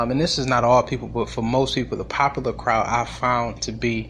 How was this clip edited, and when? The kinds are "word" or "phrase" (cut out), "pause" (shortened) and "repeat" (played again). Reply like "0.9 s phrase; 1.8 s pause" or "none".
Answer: none